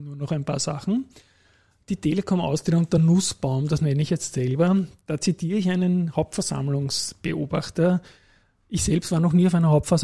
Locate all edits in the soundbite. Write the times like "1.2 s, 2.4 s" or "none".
none

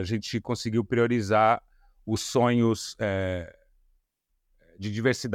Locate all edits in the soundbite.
none

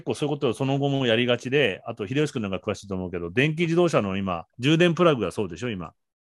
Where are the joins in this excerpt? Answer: 4.5 s

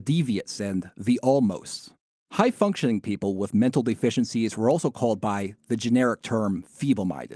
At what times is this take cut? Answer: none

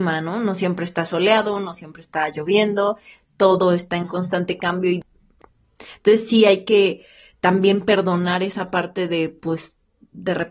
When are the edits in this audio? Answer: none

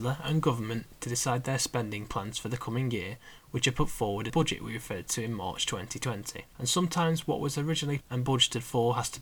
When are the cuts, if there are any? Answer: 4.3 s, 6.5 s, 8.0 s

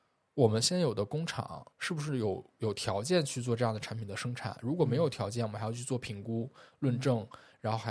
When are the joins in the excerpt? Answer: 1.7 s

